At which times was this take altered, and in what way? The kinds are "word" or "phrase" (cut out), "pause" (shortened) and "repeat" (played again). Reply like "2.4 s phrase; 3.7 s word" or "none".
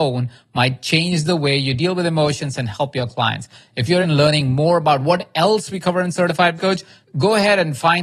4.0 s word; 6.6 s word